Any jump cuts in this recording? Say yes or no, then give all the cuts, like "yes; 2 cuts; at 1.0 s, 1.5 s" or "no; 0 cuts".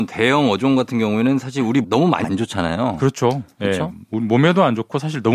yes; 2 cuts; at 1.8 s, 2.2 s